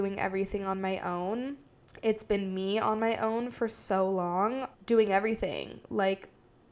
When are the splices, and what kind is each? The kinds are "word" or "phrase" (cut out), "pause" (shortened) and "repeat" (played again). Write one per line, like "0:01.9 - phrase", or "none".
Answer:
0:01.8 - pause
0:04.7 - pause